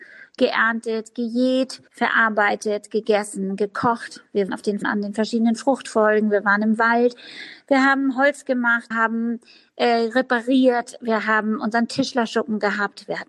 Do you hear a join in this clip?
yes; 4 cuts; at 1.9 s, 4.5 s, 4.8 s, 8.9 s

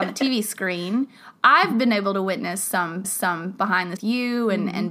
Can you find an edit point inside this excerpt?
yes; 2 cuts; at 3.0 s, 4.0 s

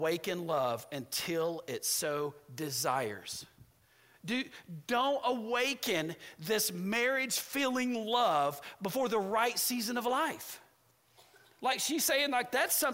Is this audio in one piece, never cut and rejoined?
yes; 0 cuts

